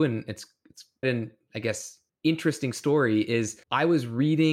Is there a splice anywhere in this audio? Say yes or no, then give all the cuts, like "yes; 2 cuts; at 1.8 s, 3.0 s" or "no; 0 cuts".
yes; 3 cuts; at 1.0 s, 2.1 s, 3.6 s